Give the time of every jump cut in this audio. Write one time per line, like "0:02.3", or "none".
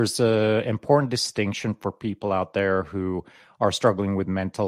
none